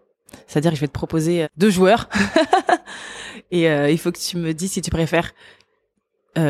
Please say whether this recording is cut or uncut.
cut